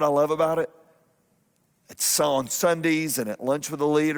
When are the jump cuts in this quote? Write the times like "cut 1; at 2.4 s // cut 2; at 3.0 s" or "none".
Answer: none